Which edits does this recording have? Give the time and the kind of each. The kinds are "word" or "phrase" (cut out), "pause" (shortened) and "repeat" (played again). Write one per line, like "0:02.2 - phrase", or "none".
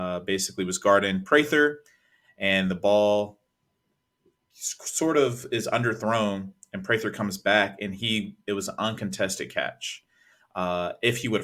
none